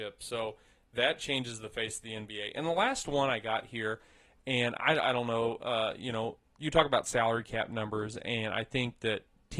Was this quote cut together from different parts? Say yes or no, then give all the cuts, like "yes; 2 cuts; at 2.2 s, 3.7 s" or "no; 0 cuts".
no; 0 cuts